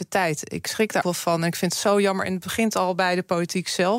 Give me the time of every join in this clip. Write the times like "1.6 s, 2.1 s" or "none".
1.0 s